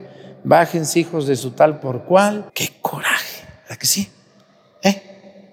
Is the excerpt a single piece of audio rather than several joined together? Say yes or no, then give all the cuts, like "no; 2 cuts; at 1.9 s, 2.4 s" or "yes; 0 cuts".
no; 1 cut; at 2.5 s